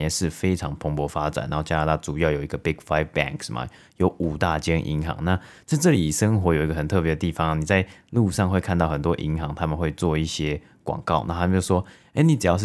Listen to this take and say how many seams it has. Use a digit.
0